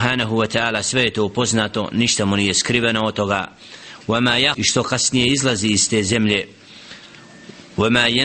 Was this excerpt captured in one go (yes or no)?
no